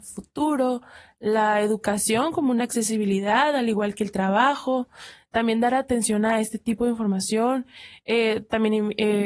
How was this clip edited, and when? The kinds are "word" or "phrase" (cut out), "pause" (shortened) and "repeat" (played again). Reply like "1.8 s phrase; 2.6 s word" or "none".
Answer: none